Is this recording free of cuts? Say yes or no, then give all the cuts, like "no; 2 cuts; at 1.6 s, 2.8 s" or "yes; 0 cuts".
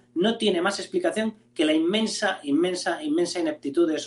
yes; 0 cuts